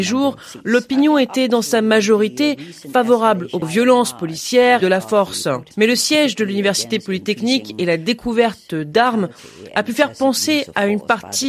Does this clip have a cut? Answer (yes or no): yes